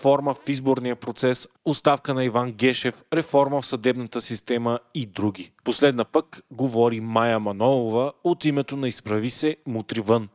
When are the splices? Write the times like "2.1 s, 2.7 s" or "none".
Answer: none